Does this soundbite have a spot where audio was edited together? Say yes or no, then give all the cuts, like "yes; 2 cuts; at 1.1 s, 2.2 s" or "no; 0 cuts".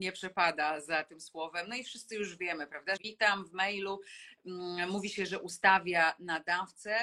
yes; 1 cut; at 3.0 s